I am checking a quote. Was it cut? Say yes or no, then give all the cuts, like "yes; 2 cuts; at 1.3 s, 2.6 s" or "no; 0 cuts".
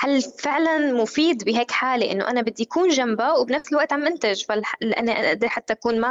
no; 0 cuts